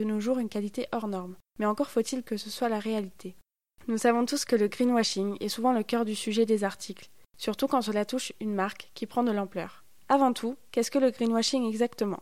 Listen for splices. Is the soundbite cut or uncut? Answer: uncut